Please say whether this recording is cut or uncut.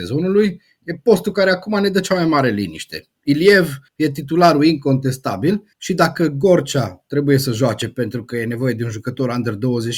cut